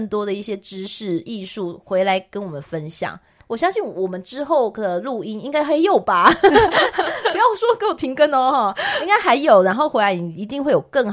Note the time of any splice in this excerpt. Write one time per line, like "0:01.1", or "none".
0:03.4